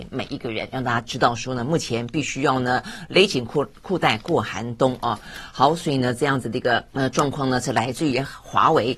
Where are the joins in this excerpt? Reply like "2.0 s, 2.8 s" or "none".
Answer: 6.9 s